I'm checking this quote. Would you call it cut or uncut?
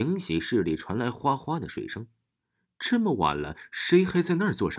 uncut